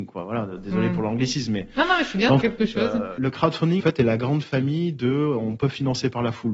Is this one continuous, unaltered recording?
no; 3 cuts; at 2.4 s, 3.2 s, 3.8 s

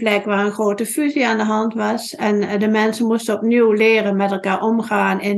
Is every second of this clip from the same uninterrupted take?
yes; 0 cuts

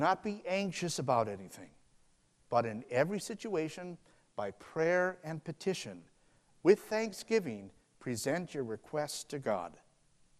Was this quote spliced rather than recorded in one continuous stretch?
no; 0 cuts

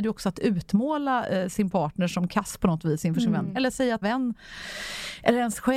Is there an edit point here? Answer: yes; 1 cut; at 4.0 s

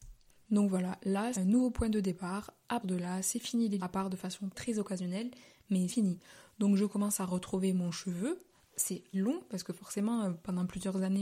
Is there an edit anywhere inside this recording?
yes; 6 cuts; at 1.3 s, 2.8 s, 3.8 s, 4.5 s, 5.9 s, 9.1 s

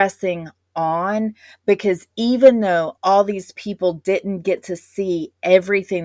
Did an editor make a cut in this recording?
no; 0 cuts

